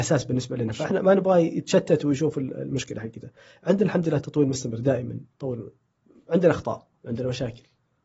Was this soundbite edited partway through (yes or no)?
yes